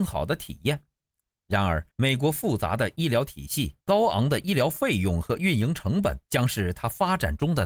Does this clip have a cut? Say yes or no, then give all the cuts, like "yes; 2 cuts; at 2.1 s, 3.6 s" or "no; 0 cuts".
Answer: yes; 3 cuts; at 1.9 s, 3.8 s, 6.2 s